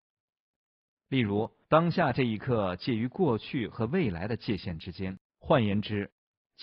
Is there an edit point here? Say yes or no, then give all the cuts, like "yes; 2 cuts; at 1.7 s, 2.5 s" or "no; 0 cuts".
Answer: yes; 2 cuts; at 1.6 s, 5.3 s